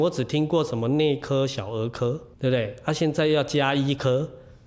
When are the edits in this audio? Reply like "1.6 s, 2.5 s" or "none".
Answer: 2.3 s